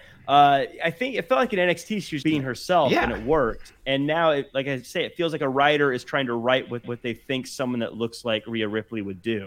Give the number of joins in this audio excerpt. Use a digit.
2